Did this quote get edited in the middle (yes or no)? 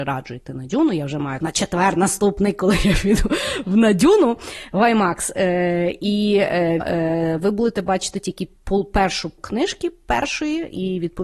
yes